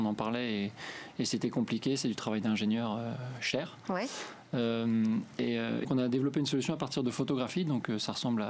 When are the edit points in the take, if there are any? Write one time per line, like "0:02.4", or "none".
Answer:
0:05.8